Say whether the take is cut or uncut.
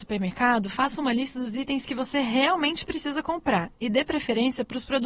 uncut